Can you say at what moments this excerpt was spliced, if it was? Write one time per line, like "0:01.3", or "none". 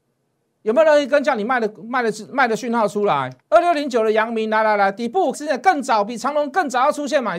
0:03.4
0:05.3